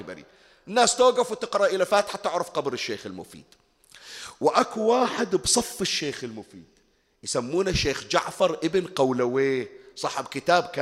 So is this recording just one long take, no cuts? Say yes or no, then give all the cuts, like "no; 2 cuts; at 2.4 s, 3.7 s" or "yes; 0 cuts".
yes; 0 cuts